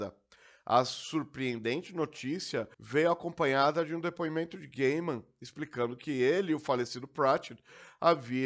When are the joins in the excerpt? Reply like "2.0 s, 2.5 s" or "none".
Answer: 2.7 s